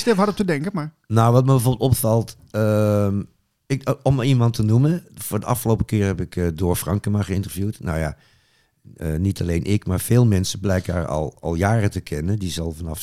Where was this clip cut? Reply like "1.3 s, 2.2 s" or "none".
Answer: none